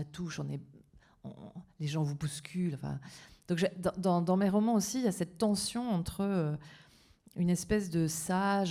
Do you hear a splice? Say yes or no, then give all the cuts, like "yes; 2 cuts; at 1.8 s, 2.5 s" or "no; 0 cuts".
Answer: no; 0 cuts